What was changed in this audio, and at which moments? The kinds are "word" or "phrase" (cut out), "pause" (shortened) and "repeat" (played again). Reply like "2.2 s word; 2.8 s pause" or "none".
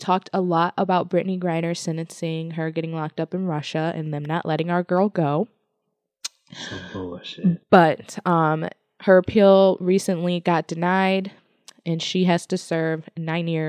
none